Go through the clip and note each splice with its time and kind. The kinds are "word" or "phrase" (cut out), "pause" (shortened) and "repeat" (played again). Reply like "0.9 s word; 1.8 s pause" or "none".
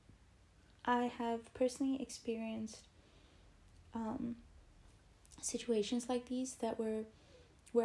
none